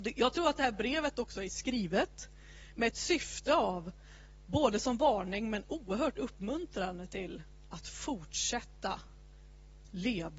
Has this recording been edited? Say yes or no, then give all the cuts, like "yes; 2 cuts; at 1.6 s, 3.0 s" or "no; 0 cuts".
no; 0 cuts